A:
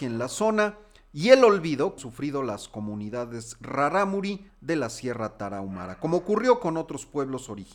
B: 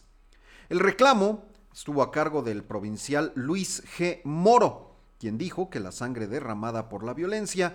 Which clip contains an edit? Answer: A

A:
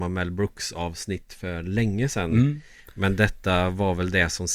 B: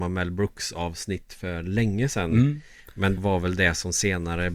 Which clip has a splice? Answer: B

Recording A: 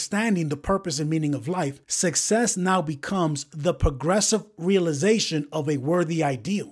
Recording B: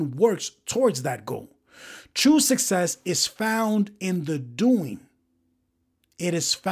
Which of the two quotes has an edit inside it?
A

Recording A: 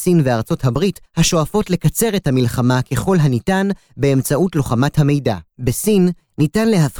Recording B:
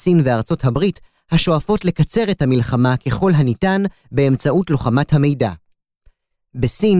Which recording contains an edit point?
A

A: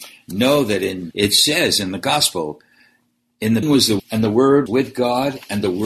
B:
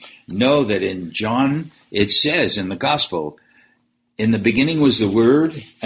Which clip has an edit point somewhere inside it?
A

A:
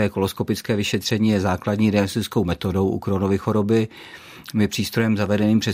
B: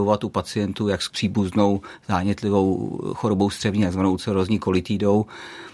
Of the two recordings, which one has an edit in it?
B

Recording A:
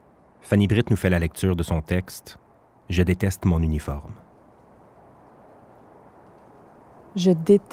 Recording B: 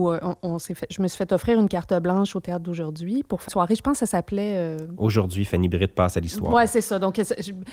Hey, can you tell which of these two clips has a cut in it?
B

